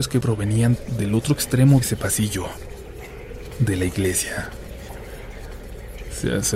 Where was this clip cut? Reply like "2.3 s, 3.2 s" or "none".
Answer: 1.8 s